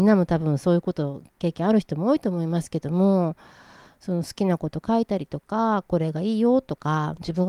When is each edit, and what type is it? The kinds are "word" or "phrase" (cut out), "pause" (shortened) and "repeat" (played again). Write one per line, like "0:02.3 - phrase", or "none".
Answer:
none